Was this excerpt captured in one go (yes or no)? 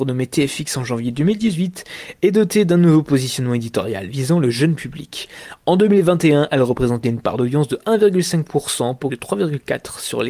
no